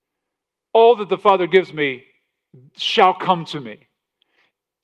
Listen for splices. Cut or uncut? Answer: uncut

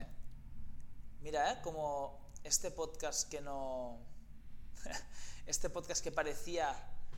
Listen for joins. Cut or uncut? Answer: uncut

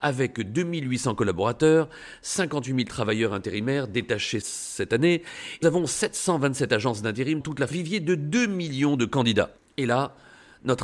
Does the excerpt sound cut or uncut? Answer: cut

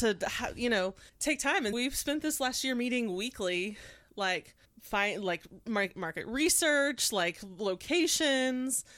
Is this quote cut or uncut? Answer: cut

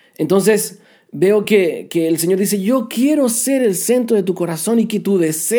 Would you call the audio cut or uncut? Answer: uncut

